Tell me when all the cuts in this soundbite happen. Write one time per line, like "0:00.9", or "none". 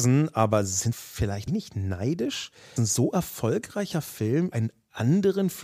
0:00.9
0:01.5
0:02.8
0:04.5